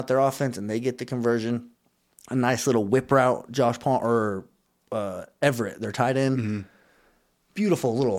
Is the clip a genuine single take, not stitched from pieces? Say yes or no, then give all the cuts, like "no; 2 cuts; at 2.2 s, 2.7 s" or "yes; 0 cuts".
yes; 0 cuts